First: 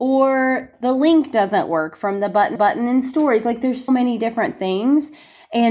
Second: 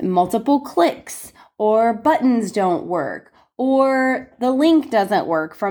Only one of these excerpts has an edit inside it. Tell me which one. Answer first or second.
first